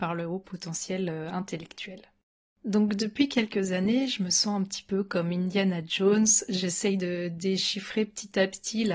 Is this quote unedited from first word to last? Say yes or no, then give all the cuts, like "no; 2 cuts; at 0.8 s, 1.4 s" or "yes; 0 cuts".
yes; 0 cuts